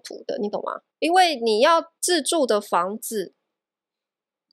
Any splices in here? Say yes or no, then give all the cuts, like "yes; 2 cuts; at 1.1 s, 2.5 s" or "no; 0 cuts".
yes; 2 cuts; at 0.9 s, 2.0 s